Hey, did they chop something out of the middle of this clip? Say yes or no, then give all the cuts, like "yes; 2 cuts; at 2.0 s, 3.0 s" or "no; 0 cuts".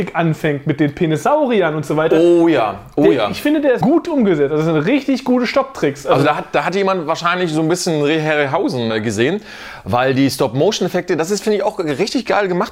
yes; 2 cuts; at 3.8 s, 8.9 s